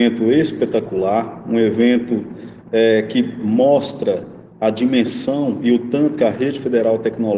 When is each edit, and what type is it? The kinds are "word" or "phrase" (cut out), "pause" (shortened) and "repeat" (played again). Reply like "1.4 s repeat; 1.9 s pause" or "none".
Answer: none